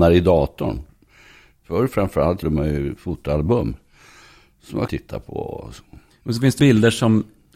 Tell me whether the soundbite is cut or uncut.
cut